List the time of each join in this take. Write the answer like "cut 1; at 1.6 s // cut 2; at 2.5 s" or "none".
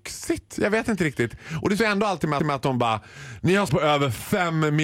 cut 1; at 1.8 s // cut 2; at 2.4 s // cut 3; at 3.7 s